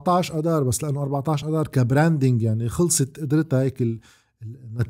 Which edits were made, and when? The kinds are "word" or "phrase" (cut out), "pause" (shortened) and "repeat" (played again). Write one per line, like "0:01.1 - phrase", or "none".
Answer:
none